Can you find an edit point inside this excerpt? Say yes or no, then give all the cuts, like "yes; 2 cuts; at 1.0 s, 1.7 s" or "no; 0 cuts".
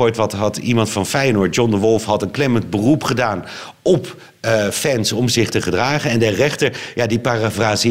no; 0 cuts